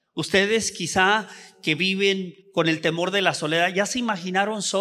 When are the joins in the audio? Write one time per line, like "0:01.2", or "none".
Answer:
0:02.4